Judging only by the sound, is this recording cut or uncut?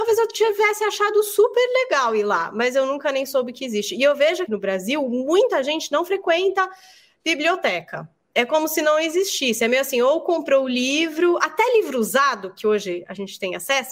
cut